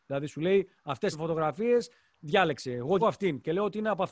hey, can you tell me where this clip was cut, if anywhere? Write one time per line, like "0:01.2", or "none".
0:01.1
0:03.0